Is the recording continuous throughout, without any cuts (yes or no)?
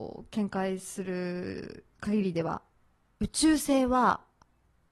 no